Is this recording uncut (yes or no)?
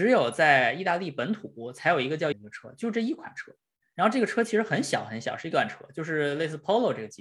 no